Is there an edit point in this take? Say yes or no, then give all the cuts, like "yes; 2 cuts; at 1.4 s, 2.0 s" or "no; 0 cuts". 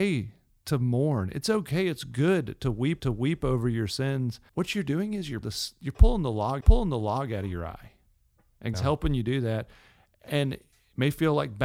yes; 5 cuts; at 3.0 s, 4.5 s, 5.4 s, 6.6 s, 8.7 s